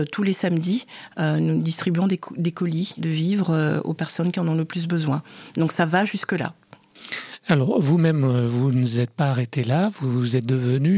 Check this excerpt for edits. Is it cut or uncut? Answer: uncut